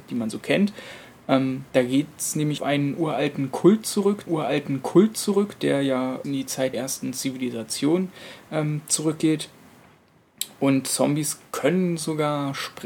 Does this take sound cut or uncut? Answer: cut